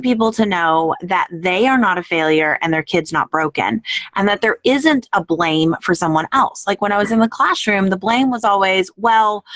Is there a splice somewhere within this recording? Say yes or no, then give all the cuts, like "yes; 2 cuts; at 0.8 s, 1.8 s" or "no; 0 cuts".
no; 0 cuts